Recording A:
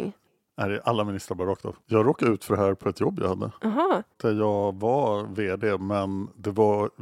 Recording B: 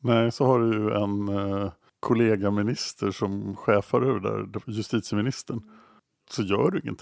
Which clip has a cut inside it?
A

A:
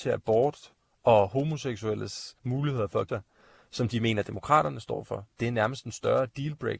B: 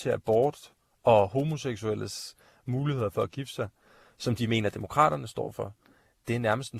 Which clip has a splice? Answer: A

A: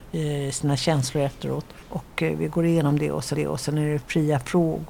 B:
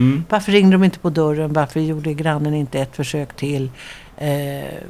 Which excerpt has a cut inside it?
A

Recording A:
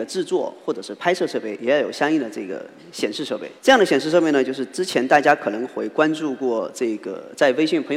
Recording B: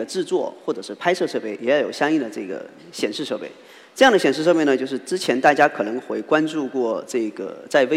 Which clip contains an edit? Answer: A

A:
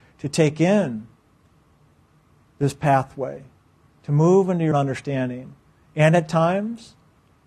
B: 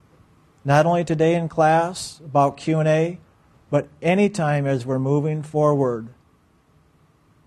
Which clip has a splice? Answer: A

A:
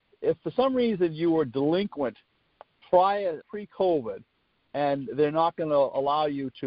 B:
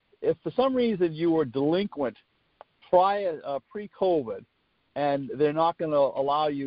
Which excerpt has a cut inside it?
A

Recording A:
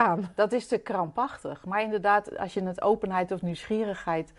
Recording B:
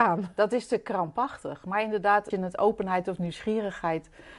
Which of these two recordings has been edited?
B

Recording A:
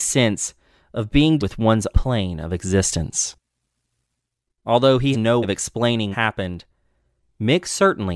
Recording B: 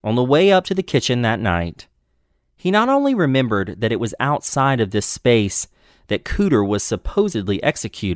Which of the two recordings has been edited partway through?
A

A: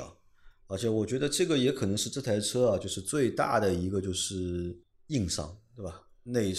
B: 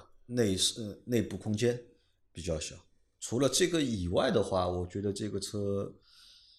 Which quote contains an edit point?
A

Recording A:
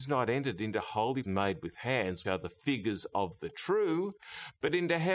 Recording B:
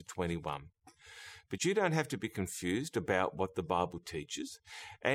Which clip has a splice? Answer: A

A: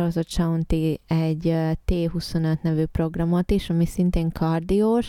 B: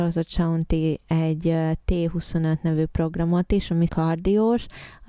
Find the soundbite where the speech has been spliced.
B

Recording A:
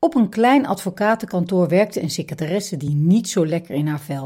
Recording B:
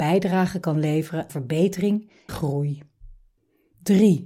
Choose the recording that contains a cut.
B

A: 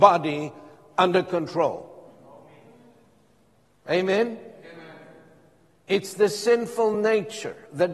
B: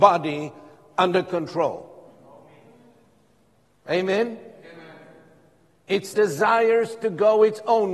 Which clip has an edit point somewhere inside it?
B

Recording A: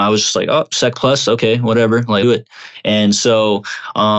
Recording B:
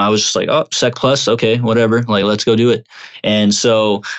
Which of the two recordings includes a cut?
A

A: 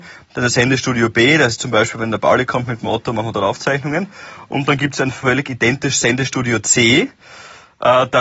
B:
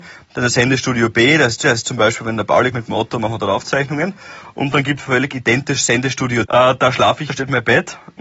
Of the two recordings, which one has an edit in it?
B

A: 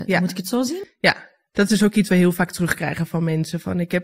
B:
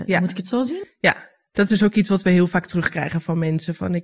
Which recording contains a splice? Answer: A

